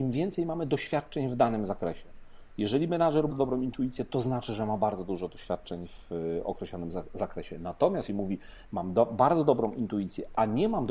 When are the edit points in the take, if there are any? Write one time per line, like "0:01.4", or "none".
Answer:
0:03.3
0:08.1